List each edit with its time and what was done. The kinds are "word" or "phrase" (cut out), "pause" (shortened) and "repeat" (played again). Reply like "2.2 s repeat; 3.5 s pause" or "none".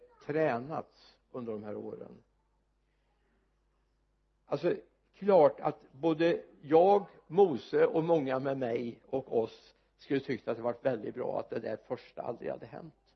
none